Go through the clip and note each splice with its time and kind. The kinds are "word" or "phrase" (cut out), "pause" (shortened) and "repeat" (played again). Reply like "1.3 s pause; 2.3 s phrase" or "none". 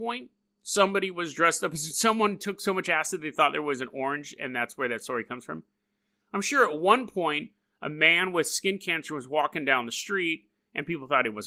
none